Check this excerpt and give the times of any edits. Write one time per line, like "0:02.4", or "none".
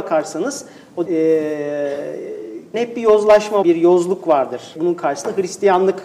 0:01.1
0:02.7
0:03.6
0:04.8